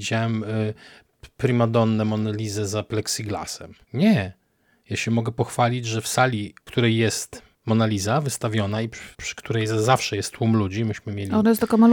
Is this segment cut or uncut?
cut